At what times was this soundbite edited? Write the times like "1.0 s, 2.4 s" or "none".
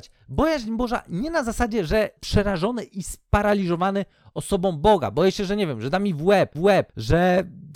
2.2 s, 6.5 s